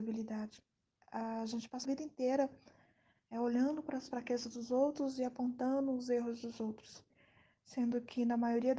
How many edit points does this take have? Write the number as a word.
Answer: one